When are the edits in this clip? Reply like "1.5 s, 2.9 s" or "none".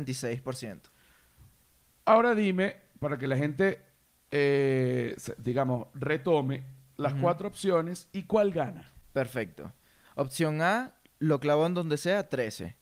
none